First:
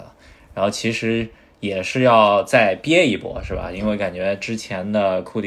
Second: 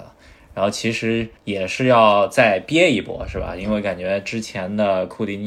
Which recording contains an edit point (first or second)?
second